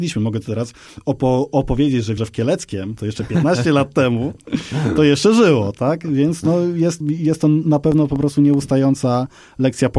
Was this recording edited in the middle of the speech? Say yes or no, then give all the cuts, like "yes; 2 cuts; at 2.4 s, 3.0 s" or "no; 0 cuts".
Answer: yes; 2 cuts; at 2.2 s, 7.0 s